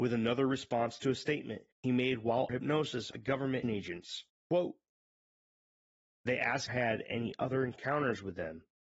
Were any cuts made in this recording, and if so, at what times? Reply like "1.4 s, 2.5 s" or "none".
1.7 s, 2.5 s, 3.1 s, 3.6 s, 4.3 s, 6.7 s